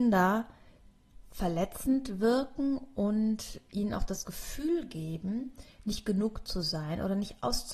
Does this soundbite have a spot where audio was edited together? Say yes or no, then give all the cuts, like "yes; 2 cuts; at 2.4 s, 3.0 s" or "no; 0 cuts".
no; 0 cuts